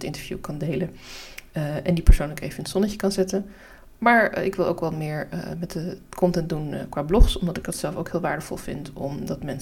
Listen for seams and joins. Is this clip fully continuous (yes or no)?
yes